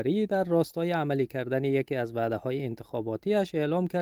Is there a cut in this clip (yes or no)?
no